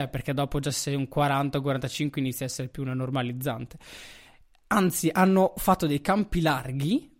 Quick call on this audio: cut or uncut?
uncut